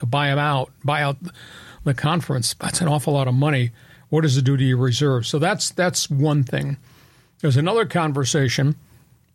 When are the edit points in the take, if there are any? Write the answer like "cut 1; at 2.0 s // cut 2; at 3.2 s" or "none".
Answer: none